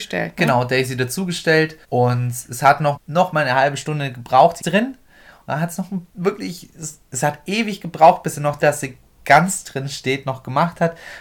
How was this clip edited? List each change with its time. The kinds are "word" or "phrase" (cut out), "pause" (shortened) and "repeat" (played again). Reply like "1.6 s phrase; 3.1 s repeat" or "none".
1.8 s pause; 3.0 s word; 4.6 s phrase; 6.1 s pause; 8.6 s phrase